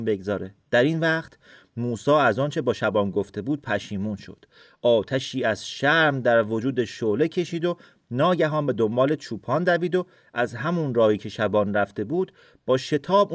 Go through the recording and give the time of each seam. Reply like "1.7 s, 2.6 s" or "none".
none